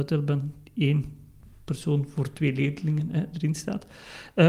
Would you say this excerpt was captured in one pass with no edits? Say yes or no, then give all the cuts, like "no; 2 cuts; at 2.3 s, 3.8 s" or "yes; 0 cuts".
yes; 0 cuts